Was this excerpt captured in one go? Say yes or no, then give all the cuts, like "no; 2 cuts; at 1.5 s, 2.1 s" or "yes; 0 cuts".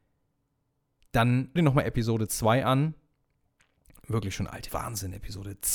no; 2 cuts; at 1.6 s, 4.7 s